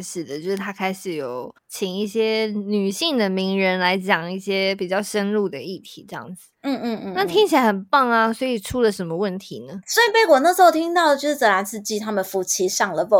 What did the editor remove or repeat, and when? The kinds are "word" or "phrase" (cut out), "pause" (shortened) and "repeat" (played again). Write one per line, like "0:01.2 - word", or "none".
0:01.6 - pause
0:06.6 - pause